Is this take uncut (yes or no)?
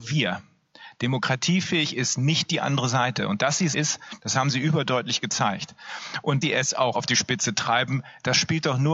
no